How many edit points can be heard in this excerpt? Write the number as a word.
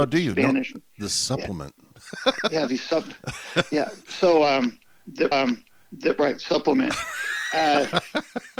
one